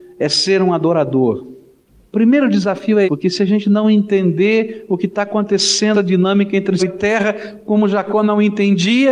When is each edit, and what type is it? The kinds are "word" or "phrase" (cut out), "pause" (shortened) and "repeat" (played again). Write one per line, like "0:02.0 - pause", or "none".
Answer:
0:03.0 - word
0:05.9 - word
0:06.8 - word